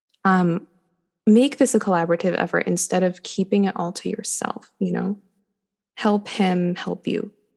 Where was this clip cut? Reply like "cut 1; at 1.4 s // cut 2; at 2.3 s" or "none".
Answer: none